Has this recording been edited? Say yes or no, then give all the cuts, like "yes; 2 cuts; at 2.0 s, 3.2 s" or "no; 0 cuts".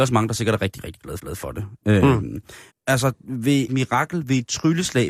yes; 3 cuts; at 1.2 s, 2.7 s, 3.7 s